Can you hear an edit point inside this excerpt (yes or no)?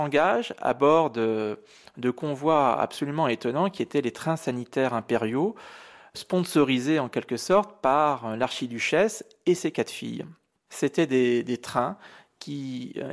no